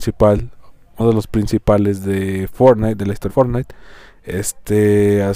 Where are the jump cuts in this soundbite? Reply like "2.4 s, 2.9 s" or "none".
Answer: 1.0 s, 3.3 s